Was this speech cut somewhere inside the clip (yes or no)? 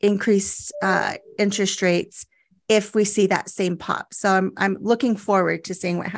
no